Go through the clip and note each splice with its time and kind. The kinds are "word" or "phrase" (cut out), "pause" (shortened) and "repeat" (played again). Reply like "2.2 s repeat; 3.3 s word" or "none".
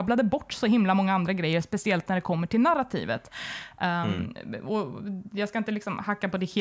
none